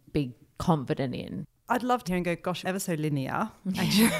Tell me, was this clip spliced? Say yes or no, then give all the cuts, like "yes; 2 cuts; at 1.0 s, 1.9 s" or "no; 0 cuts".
yes; 2 cuts; at 2.0 s, 2.6 s